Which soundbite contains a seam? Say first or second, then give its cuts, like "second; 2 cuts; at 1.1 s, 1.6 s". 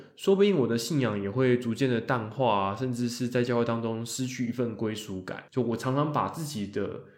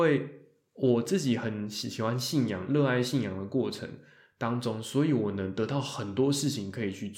first; 1 cut; at 5.5 s